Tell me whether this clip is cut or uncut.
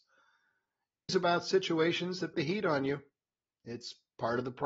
cut